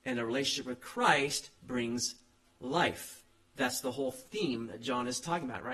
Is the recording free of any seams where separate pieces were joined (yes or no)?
no